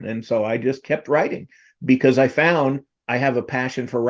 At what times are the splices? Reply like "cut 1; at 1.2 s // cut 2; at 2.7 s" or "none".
none